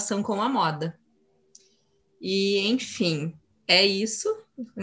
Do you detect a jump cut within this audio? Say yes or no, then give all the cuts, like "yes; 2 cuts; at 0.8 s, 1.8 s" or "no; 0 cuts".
no; 0 cuts